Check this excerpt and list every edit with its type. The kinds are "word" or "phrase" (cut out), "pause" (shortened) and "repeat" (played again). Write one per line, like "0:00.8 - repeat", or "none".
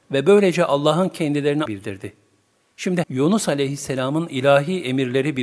0:01.7 - word
0:03.0 - word